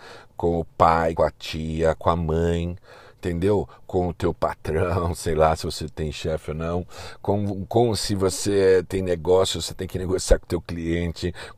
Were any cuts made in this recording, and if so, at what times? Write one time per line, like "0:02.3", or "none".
0:01.2